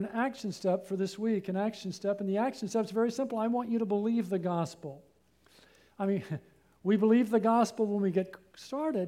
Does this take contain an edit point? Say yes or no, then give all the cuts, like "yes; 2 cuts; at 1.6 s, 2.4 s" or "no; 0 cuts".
no; 0 cuts